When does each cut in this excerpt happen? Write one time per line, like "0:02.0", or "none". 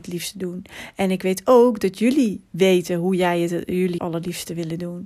0:04.0